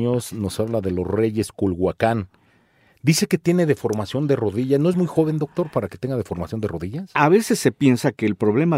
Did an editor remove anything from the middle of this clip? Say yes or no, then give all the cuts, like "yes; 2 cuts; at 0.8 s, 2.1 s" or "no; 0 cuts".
no; 0 cuts